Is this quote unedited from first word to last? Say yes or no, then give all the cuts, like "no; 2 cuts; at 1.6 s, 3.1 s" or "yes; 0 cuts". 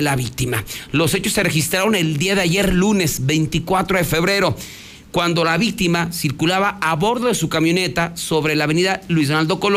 yes; 0 cuts